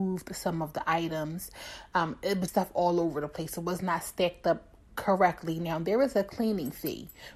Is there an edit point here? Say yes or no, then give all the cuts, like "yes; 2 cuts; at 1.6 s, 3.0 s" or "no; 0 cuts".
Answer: yes; 1 cut; at 2.5 s